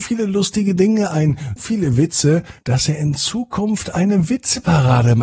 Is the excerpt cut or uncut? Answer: cut